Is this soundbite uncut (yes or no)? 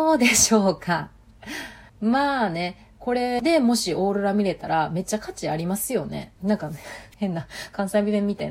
no